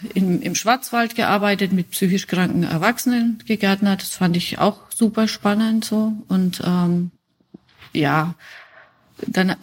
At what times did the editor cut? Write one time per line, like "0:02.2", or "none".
none

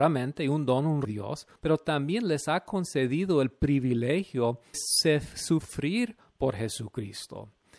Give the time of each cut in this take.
0:01.1
0:01.6
0:04.7

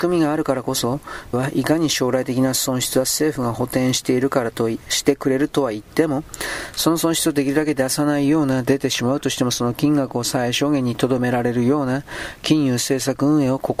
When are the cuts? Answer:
0:01.3

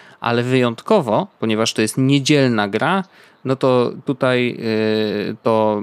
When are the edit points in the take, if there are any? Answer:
none

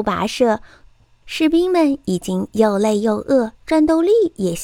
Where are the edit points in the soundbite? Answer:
0:03.5

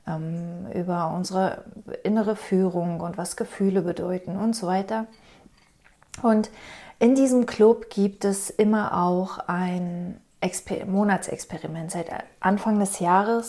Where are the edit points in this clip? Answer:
none

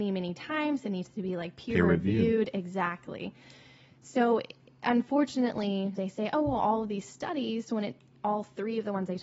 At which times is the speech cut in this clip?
0:06.0

